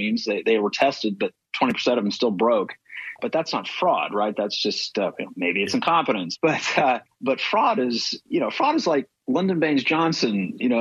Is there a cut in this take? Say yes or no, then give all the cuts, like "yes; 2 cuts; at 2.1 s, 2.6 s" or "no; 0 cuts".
yes; 1 cut; at 9.2 s